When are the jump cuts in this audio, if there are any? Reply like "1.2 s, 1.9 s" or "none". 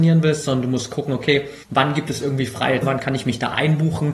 1.6 s, 2.8 s